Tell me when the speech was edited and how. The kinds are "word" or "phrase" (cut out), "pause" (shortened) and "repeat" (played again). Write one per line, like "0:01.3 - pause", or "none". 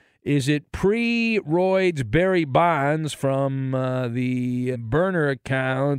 0:04.7 - word